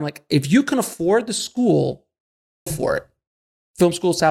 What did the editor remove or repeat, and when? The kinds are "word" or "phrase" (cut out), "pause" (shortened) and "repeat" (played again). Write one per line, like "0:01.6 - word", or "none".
0:02.7 - word